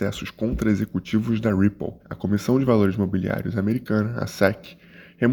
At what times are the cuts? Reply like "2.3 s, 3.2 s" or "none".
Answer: 2.0 s